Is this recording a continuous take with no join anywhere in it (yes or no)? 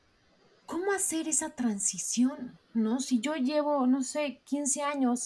yes